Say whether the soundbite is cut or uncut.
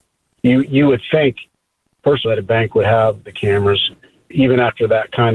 cut